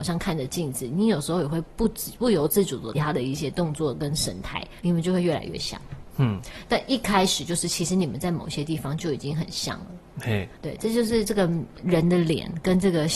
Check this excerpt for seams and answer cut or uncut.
cut